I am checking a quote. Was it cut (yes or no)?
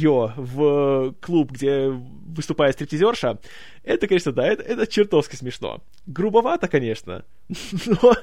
no